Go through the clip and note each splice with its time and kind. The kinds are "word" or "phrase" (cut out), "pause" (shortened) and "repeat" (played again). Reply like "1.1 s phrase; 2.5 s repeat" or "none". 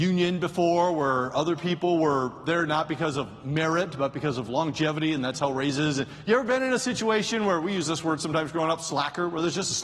none